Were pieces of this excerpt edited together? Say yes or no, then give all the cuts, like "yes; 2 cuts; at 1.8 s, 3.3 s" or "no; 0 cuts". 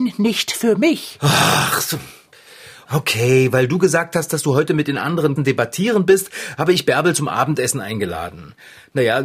yes; 1 cut; at 5.4 s